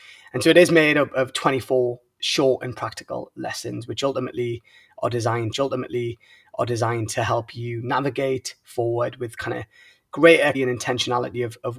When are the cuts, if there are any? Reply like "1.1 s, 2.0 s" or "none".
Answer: 5.5 s, 10.5 s